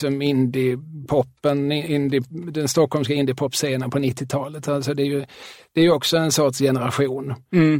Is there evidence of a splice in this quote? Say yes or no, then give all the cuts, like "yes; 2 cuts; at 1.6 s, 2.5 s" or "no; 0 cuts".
no; 0 cuts